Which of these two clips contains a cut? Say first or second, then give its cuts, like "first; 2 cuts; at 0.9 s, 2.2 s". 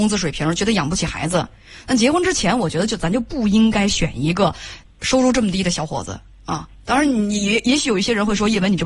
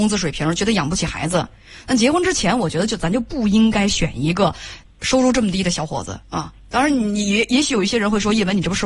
second; 1 cut; at 6.2 s